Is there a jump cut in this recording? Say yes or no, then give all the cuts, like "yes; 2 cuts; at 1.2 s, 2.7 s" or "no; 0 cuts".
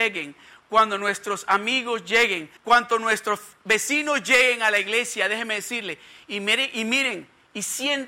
yes; 1 cut; at 2.6 s